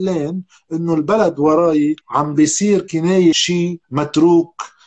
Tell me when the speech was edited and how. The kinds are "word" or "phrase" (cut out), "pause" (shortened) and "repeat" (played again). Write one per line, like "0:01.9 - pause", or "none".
0:02.0 - pause
0:03.3 - word
0:03.8 - pause